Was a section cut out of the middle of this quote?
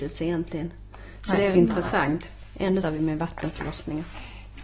yes; 2 cuts; at 1.5 s, 2.8 s

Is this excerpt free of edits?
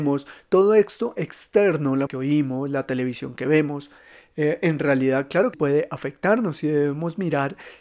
no; 2 cuts; at 2.1 s, 5.5 s

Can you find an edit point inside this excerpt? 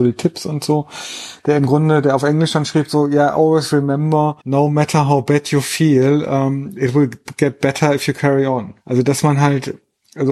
yes; 2 cuts; at 4.4 s, 8.8 s

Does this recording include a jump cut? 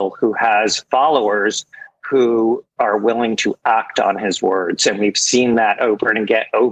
no; 0 cuts

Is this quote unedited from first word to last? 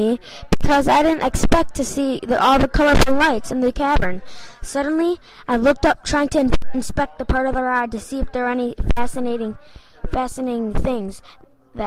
yes; 0 cuts

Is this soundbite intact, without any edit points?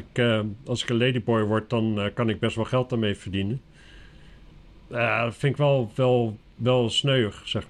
yes; 0 cuts

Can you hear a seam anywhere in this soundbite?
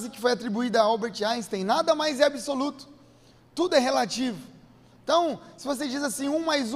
no; 0 cuts

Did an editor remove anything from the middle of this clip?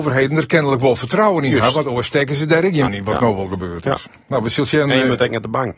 yes; 1 cut; at 2.9 s

